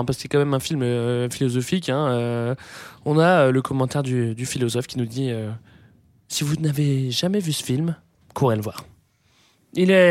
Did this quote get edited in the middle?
no; 0 cuts

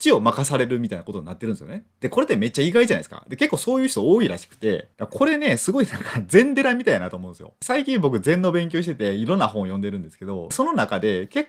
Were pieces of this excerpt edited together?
no; 0 cuts

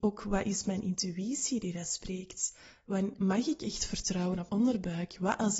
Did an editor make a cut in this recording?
yes; 2 cuts; at 3.2 s, 4.5 s

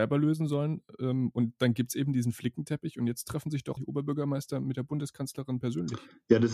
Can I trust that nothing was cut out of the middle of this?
no; 1 cut; at 3.8 s

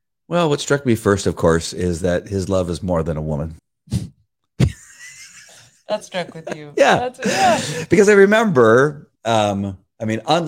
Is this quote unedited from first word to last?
no; 3 cuts; at 3.6 s, 6.0 s, 9.2 s

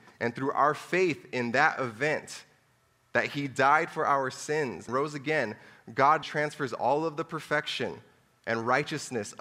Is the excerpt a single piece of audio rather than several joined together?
no; 2 cuts; at 4.9 s, 6.2 s

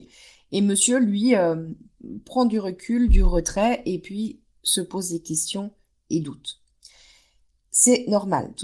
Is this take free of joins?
yes; 0 cuts

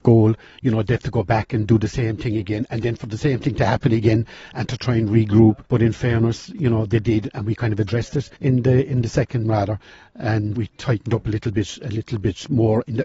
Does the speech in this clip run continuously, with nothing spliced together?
no; 4 cuts; at 5.6 s, 8.4 s, 9.4 s, 10.5 s

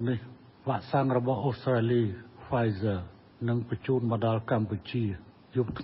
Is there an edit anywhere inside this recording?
no; 0 cuts

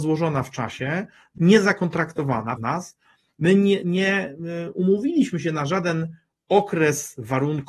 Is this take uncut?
no; 3 cuts; at 1.4 s, 2.6 s, 3.8 s

